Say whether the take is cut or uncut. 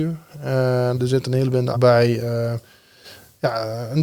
cut